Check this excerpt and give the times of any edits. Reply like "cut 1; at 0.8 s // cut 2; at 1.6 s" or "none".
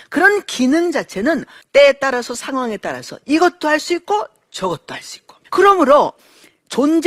cut 1; at 1.6 s // cut 2; at 5.5 s